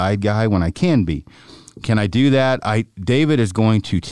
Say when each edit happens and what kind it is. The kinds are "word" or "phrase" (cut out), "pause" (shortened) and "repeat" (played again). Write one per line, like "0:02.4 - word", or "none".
none